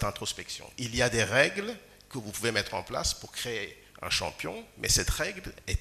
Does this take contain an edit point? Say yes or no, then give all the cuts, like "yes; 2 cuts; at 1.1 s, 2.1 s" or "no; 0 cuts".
no; 0 cuts